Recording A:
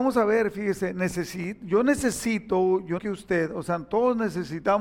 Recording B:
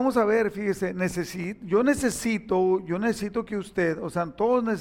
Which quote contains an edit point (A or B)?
A